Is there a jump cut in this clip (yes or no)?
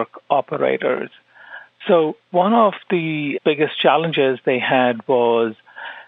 yes